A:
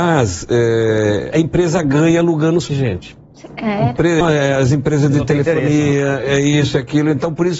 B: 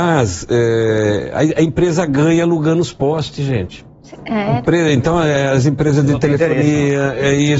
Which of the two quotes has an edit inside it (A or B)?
A